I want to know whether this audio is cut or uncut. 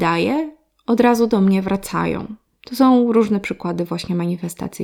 cut